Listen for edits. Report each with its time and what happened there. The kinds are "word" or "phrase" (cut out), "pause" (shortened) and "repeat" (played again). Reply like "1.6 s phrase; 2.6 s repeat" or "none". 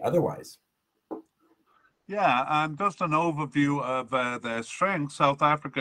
none